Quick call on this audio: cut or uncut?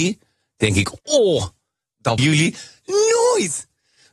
cut